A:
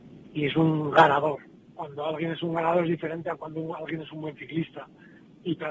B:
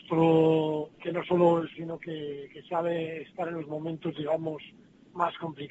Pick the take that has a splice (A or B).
B